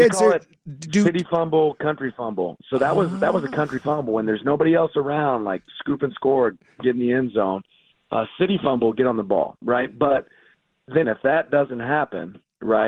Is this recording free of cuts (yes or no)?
no